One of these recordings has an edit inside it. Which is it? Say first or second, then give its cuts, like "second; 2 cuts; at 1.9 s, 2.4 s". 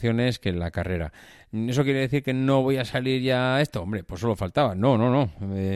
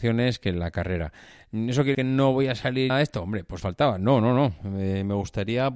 second; 3 cuts; at 1.9 s, 2.9 s, 3.6 s